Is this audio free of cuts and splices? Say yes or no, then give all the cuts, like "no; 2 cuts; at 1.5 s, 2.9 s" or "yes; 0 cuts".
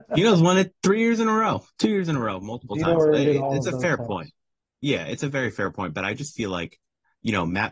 yes; 0 cuts